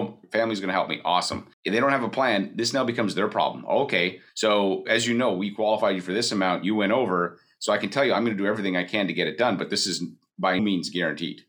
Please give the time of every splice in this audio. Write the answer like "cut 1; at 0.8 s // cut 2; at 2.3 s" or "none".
cut 1; at 1.5 s // cut 2; at 4.3 s // cut 3; at 10.6 s